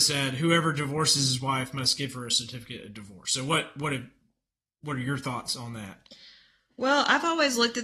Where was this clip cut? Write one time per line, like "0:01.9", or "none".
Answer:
none